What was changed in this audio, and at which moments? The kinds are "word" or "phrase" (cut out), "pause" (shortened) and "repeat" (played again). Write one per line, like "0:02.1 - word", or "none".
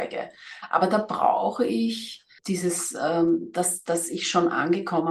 0:02.4 - word